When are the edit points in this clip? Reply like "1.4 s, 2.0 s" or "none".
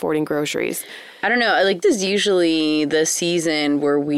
1.8 s